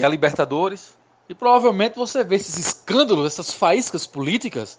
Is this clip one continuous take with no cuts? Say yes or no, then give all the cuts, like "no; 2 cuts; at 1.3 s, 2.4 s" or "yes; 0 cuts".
yes; 0 cuts